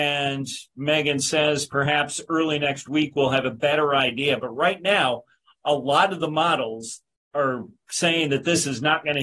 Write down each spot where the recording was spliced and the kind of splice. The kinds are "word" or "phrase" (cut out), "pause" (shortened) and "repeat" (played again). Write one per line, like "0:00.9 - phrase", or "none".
none